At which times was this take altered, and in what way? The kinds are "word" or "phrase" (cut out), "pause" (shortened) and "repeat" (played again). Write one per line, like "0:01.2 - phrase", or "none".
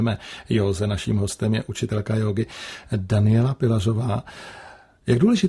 none